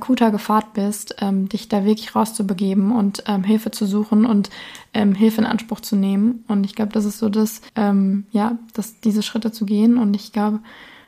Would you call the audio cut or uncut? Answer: cut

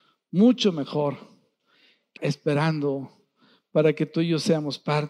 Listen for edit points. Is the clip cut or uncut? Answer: cut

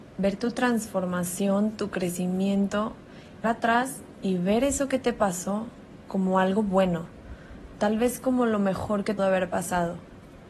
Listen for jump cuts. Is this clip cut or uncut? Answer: cut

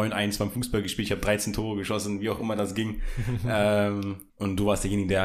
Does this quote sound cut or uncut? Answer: cut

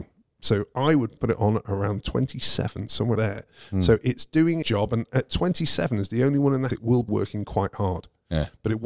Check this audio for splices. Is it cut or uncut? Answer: cut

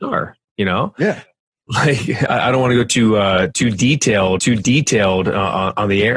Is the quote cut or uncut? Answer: cut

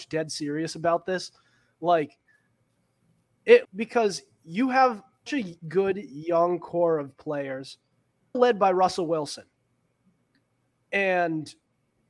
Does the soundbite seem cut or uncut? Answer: cut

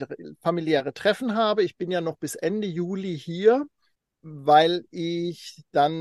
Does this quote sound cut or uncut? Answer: uncut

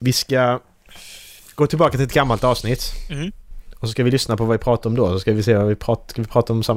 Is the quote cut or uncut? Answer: uncut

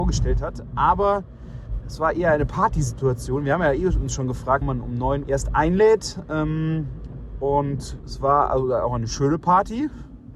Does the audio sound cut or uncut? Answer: cut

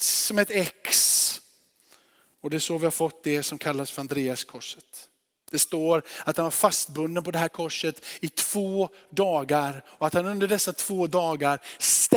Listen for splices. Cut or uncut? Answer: uncut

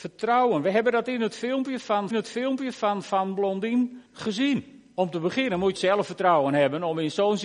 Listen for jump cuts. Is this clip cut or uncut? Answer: cut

